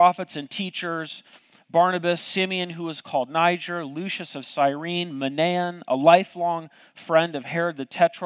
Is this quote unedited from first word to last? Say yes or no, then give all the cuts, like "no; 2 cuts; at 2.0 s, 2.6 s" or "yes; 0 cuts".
yes; 0 cuts